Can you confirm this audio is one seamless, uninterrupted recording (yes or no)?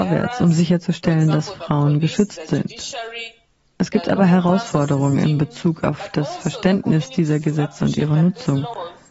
yes